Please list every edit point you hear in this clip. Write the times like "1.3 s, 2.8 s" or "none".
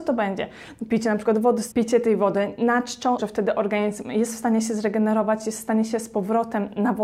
1.7 s, 3.2 s

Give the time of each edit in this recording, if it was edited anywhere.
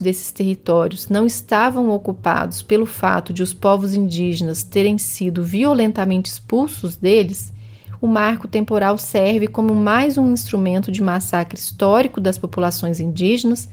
none

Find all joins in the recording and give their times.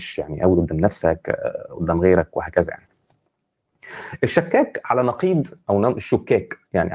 none

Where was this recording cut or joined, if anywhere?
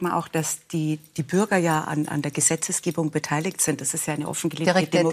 none

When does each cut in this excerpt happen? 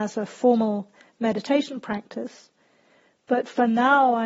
none

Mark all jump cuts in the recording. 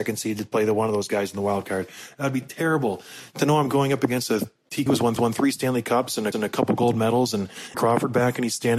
4.9 s, 5.2 s, 6.3 s, 7.7 s

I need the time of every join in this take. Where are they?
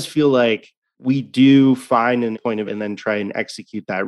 2.3 s, 2.7 s

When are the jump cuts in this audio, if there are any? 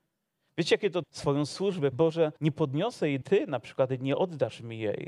1.0 s, 1.9 s, 2.4 s, 3.2 s

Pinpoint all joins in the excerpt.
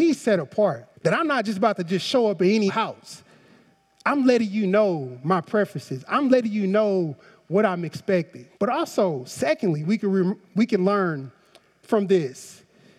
0.9 s, 2.7 s, 8.5 s

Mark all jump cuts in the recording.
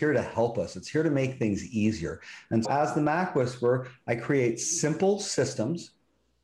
2.6 s

